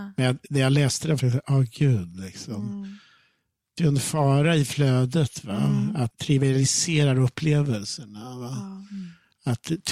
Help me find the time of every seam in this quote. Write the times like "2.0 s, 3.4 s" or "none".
1.2 s, 3.8 s, 6.1 s